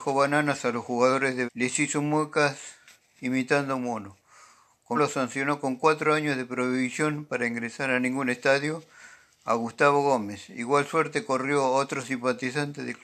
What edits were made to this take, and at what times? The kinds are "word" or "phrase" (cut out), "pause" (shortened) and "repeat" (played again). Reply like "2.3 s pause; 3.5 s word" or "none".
1.5 s word; 5.0 s word